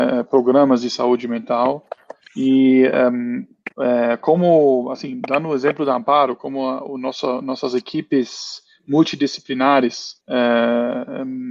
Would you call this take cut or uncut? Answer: cut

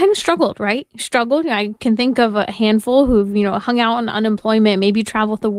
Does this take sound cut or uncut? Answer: uncut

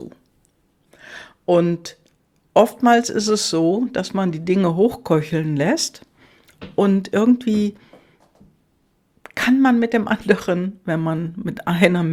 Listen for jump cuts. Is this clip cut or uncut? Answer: uncut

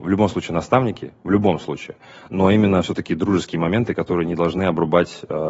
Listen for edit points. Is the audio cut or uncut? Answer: uncut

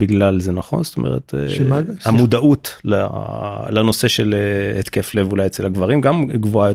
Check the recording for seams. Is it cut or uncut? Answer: uncut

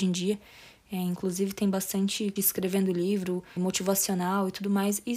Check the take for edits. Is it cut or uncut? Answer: cut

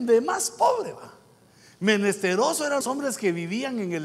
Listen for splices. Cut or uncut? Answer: cut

